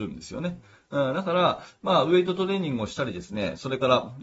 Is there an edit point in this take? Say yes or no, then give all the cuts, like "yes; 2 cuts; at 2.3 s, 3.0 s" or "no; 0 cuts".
no; 0 cuts